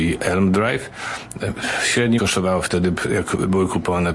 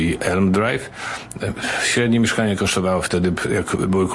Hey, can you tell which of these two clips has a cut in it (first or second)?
first